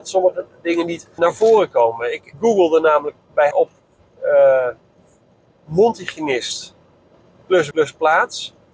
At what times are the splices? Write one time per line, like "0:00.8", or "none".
0:01.2
0:02.3
0:03.5
0:07.7